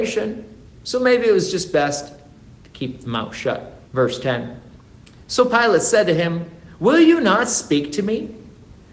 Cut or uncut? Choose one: cut